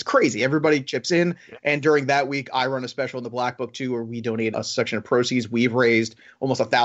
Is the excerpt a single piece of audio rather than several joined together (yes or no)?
no